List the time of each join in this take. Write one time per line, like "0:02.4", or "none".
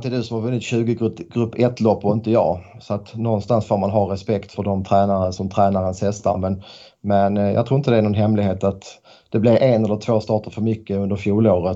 0:04.5
0:05.4
0:09.6